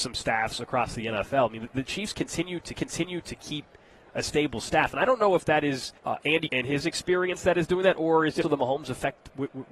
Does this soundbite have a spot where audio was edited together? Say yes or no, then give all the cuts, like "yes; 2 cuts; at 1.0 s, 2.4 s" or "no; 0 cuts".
yes; 4 cuts; at 2.7 s, 6.0 s, 6.5 s, 8.4 s